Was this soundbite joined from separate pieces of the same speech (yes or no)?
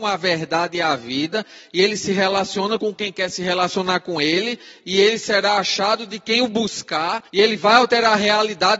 yes